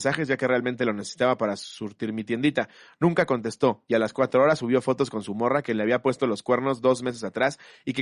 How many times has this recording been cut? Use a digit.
0